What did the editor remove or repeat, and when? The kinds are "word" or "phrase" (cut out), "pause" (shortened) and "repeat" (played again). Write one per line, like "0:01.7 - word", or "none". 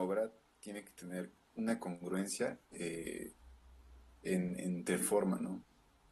0:02.6 - pause
0:05.0 - word